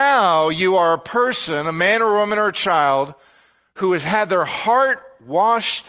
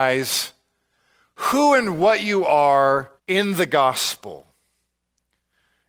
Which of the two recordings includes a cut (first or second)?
second